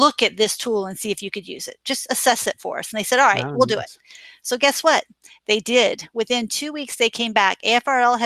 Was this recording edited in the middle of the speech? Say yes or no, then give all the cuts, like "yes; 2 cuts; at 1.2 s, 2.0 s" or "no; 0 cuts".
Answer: no; 0 cuts